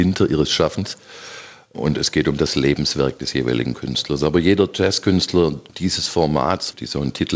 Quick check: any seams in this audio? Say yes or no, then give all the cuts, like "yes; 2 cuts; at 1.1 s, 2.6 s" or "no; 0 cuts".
no; 0 cuts